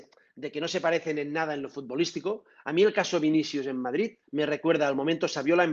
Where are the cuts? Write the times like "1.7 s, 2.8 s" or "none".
4.2 s